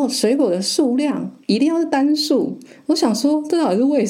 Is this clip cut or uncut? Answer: cut